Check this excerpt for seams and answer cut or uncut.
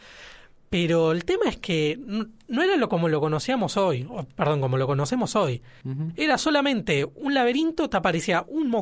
uncut